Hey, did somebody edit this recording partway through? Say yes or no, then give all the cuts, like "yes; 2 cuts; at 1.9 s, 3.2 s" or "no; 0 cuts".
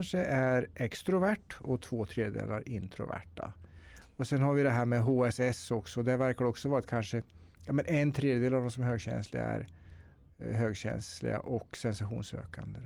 no; 0 cuts